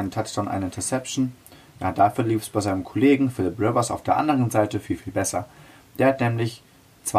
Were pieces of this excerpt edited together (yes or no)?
no